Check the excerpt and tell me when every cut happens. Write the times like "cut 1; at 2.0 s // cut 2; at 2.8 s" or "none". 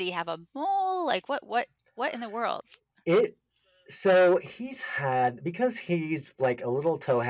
none